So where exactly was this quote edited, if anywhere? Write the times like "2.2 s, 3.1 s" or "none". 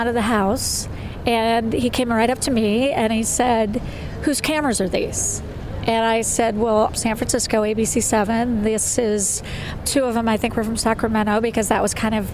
6.9 s, 9.8 s